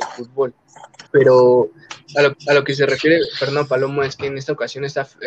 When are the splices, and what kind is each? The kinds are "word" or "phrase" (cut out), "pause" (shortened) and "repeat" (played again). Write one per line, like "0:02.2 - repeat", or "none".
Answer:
0:01.1 - pause
0:02.3 - repeat